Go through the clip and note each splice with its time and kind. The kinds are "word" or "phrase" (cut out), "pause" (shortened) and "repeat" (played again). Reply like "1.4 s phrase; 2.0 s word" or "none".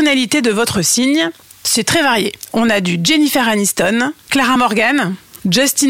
none